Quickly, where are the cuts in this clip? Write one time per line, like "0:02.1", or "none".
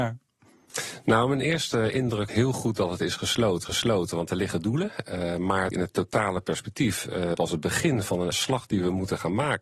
0:02.3
0:03.6
0:05.7
0:07.3
0:08.3